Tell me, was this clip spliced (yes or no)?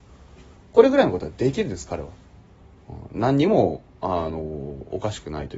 no